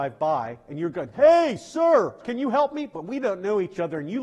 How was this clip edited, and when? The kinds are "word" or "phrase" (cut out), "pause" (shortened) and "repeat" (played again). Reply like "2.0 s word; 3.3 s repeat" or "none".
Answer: 2.2 s word